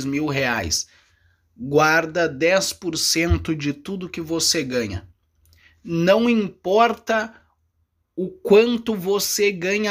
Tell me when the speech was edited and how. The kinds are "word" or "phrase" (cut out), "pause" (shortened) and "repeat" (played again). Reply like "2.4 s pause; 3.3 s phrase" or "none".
none